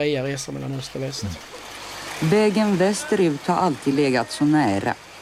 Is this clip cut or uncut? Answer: uncut